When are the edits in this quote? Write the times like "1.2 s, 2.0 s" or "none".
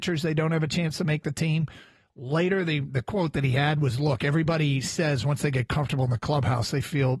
none